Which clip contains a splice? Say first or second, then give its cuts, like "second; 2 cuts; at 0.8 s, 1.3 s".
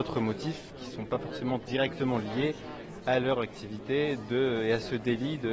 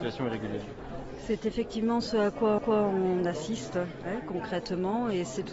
second; 1 cut; at 2.6 s